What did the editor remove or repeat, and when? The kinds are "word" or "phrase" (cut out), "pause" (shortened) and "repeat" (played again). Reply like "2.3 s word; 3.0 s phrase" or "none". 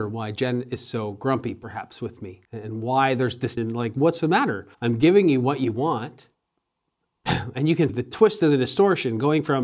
2.4 s pause; 3.6 s word; 4.7 s pause; 6.3 s pause; 7.9 s word